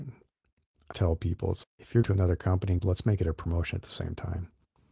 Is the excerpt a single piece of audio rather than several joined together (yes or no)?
no